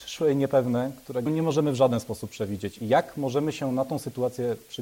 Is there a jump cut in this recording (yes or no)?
yes